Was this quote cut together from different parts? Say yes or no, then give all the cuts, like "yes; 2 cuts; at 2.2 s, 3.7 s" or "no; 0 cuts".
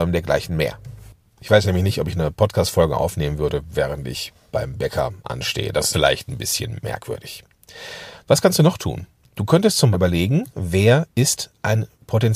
yes; 3 cuts; at 1.1 s, 5.9 s, 9.9 s